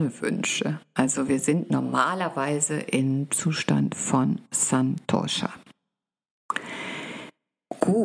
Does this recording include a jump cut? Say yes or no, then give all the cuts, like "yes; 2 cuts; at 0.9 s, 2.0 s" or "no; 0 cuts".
no; 0 cuts